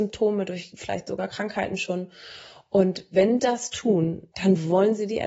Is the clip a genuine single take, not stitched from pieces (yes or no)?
no